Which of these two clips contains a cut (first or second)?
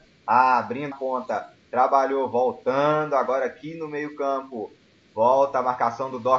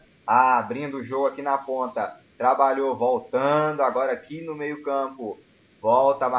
first